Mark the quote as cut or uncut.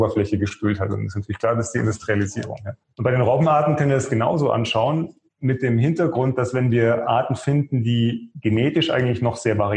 uncut